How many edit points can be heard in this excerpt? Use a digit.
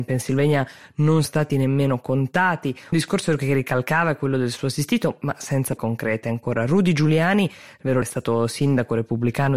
4